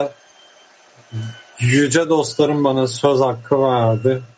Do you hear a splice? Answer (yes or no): no